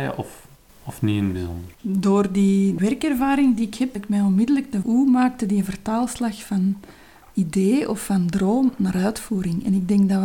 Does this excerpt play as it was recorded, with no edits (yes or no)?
no